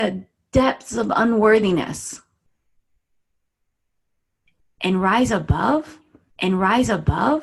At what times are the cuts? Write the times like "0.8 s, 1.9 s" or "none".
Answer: 6.3 s